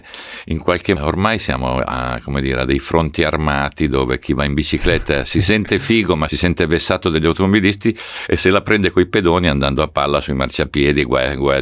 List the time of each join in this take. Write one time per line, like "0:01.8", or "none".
0:01.0
0:06.3